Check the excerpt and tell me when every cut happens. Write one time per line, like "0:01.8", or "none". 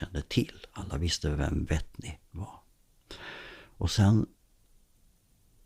none